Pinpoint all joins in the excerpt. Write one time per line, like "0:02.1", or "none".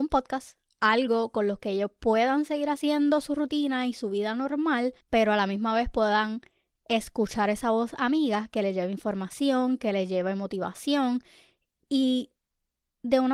0:05.0